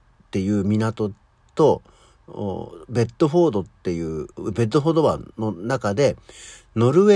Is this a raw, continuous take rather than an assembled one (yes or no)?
no